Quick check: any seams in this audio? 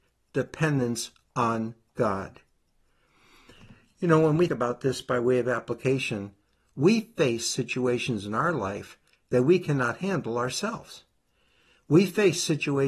yes; 1 cut; at 4.5 s

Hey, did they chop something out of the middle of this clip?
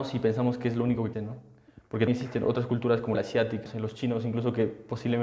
yes; 4 cuts; at 1.1 s, 2.1 s, 3.1 s, 3.7 s

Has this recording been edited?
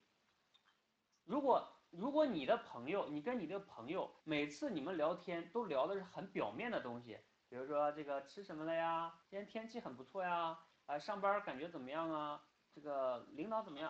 yes; 3 cuts; at 4.2 s, 9.2 s, 12.7 s

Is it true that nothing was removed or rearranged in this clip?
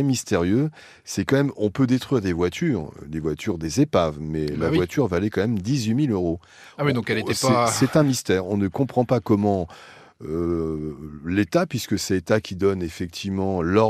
yes; 0 cuts

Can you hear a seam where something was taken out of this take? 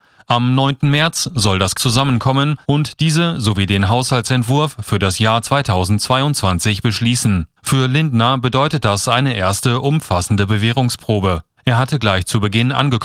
yes; 4 cuts; at 1.7 s, 2.6 s, 7.6 s, 11.6 s

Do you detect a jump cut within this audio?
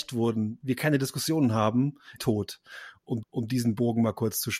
yes; 2 cuts; at 2.2 s, 3.2 s

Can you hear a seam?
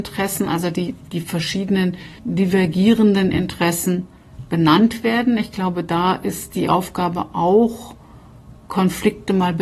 yes; 2 cuts; at 2.2 s, 8.6 s

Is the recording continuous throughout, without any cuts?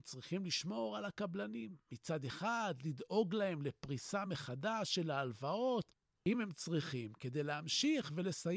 yes; 0 cuts

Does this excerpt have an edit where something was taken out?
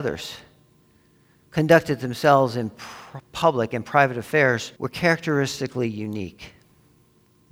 yes; 1 cut; at 4.8 s

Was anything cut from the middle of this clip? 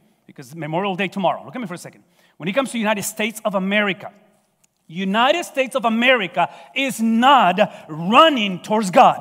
no; 0 cuts

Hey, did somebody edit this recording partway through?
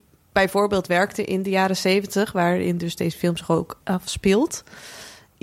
yes; 1 cut; at 3.8 s

